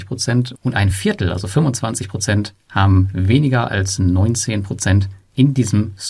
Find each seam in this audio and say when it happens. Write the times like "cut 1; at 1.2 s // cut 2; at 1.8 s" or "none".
none